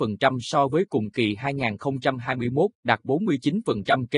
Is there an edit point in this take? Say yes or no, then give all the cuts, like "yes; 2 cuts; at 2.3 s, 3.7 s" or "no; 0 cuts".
yes; 1 cut; at 2.7 s